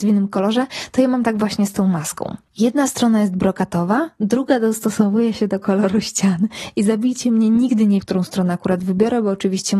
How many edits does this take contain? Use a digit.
1